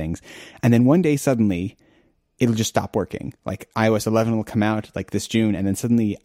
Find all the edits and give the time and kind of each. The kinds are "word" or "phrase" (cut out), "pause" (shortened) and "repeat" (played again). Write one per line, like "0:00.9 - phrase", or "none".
none

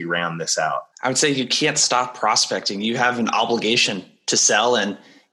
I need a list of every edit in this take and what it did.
0:00.9 - pause

